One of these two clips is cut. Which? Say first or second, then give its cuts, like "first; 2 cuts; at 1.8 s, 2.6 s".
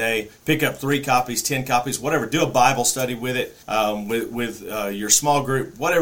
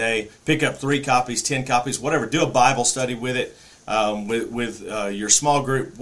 first; 1 cut; at 3.6 s